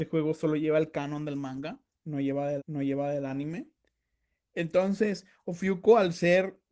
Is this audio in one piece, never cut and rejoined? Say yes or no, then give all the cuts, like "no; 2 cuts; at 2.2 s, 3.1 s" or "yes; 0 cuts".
no; 1 cut; at 2.6 s